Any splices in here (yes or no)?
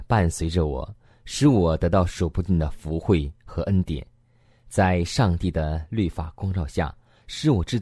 no